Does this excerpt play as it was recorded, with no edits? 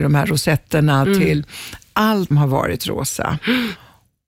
no; 1 cut; at 2.3 s

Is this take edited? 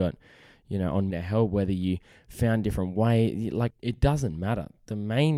yes; 2 cuts; at 1.1 s, 3.7 s

